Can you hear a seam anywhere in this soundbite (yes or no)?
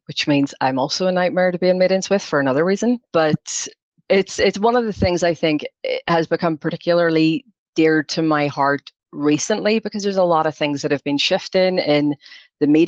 no